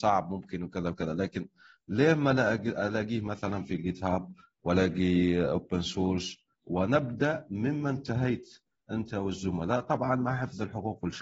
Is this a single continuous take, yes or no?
yes